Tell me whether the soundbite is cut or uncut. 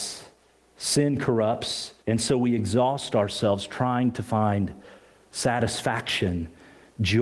cut